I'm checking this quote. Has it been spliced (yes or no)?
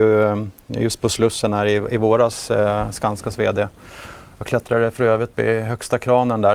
yes